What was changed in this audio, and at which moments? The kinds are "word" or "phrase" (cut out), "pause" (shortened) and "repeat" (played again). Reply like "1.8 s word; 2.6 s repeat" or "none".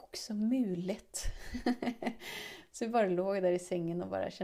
none